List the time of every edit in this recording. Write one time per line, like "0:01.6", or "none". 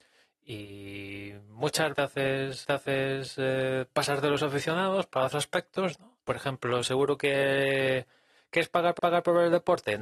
0:01.9
0:02.6
0:05.3
0:06.2
0:09.0